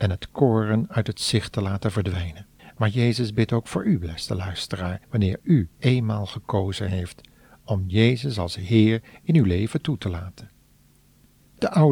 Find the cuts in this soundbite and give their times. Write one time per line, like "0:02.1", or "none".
0:02.6
0:05.0
0:05.7